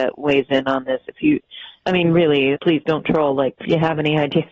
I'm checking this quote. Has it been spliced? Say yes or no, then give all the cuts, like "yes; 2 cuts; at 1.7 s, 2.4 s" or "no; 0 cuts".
yes; 2 cuts; at 2.6 s, 3.6 s